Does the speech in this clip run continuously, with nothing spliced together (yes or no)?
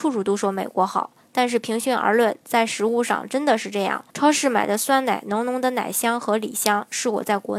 no